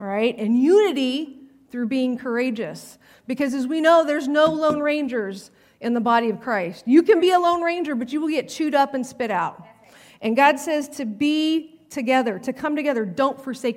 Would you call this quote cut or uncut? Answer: uncut